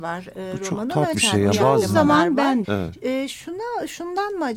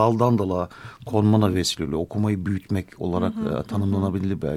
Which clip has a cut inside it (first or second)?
first